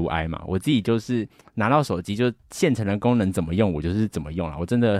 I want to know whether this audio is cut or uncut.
uncut